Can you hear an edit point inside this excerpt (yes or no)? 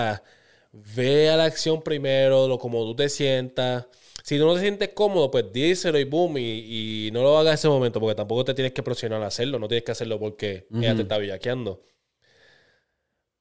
no